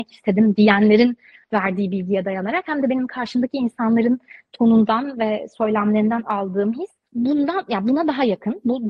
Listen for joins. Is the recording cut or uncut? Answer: cut